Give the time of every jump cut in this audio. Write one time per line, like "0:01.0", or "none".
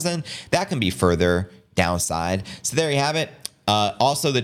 none